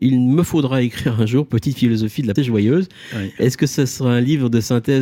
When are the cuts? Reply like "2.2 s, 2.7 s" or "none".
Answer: 2.4 s